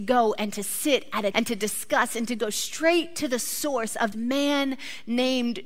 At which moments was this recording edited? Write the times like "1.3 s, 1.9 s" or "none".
1.3 s, 4.1 s